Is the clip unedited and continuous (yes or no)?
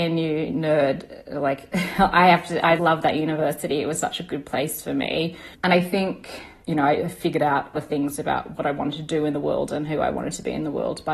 no